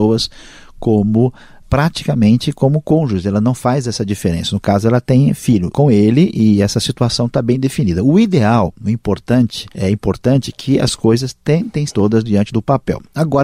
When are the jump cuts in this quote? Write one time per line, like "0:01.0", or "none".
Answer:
0:01.6
0:05.7
0:09.7
0:11.9